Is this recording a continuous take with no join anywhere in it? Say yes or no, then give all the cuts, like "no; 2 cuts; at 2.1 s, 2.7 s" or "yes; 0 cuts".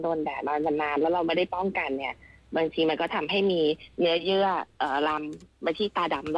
yes; 0 cuts